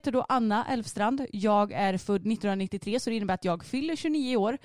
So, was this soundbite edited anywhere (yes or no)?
no